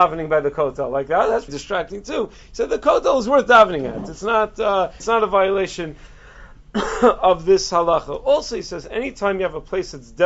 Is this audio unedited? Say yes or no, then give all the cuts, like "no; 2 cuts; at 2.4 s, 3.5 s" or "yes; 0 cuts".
no; 2 cuts; at 1.5 s, 5.0 s